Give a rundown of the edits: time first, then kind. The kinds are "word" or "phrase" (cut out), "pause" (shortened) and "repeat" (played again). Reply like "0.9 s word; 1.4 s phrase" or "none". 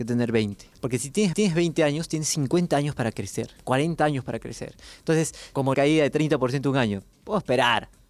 1.3 s repeat; 5.7 s phrase